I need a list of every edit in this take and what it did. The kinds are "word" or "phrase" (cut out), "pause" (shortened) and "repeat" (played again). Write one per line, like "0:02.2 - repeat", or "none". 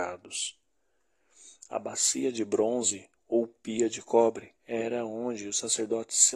0:03.2 - pause
0:04.6 - pause